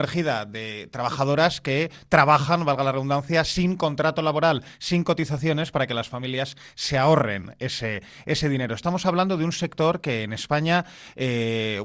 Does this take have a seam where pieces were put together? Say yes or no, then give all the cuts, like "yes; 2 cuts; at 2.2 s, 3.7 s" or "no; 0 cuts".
no; 0 cuts